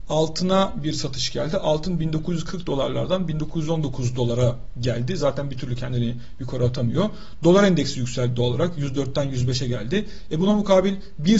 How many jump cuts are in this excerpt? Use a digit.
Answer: 0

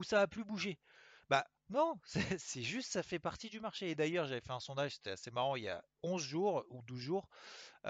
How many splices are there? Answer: 1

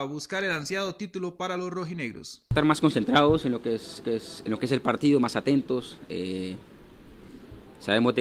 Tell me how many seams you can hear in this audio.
1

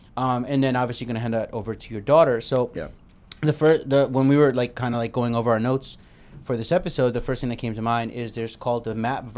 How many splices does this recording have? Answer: 0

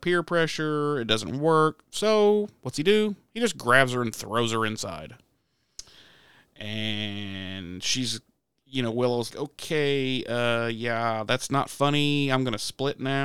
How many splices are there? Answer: 1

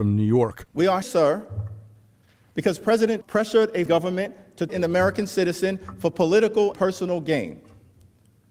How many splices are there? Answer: 5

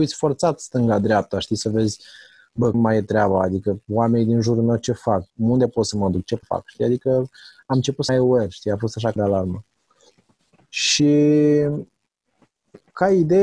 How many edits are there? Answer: 5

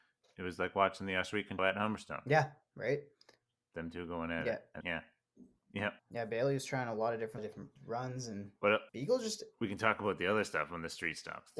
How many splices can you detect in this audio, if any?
6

